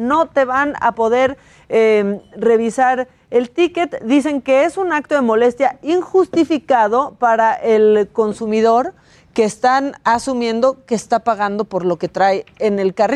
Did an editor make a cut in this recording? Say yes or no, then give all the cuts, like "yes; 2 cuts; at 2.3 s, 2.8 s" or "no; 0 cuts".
no; 0 cuts